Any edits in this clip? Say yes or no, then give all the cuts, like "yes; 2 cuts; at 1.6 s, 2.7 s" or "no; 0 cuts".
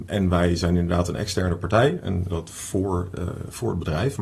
yes; 1 cut; at 2.3 s